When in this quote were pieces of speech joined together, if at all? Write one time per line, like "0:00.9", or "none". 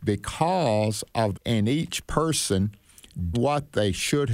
0:01.3
0:03.3